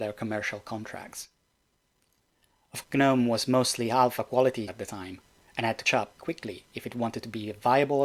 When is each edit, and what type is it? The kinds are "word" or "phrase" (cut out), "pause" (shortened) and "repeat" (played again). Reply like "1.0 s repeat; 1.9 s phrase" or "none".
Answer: 2.8 s word; 4.7 s word; 5.9 s word; 6.2 s word